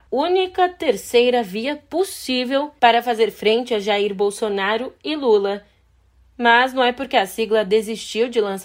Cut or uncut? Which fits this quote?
uncut